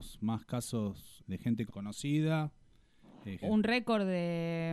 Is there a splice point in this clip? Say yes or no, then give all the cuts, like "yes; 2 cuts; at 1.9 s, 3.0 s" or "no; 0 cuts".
yes; 3 cuts; at 1.2 s, 1.7 s, 3.4 s